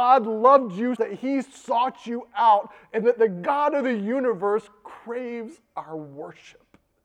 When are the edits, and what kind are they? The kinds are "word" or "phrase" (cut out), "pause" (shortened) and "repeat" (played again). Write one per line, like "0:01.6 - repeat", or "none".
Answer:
0:01.0 - phrase